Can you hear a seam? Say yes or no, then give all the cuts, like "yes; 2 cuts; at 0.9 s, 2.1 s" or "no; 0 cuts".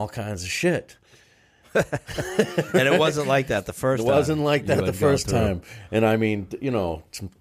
no; 0 cuts